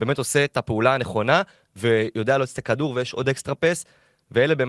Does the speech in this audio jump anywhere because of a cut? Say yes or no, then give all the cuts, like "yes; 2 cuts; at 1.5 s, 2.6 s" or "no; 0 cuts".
no; 0 cuts